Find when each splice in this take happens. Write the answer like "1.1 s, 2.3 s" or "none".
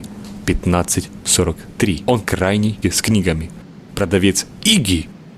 2.2 s, 2.8 s